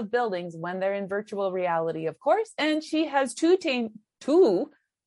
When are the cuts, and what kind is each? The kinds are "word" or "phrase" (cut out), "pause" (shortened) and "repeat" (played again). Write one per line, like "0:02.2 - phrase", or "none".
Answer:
none